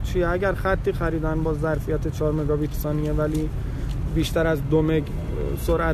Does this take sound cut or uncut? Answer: cut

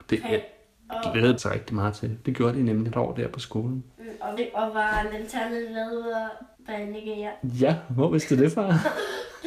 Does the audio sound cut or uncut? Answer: cut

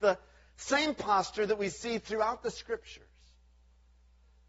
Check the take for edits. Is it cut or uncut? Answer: uncut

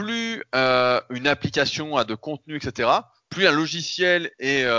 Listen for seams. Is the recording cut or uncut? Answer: uncut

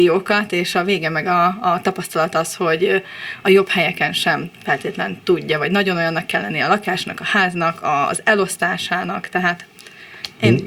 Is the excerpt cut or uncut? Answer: uncut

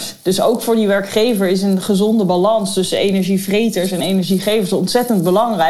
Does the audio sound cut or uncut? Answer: uncut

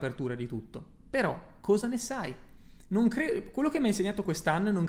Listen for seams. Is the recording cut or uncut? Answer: uncut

